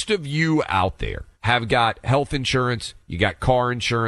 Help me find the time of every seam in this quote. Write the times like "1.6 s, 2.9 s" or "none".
1.3 s